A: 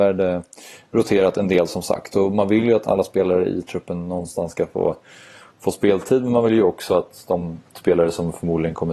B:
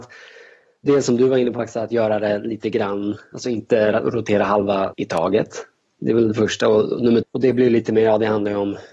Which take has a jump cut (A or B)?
B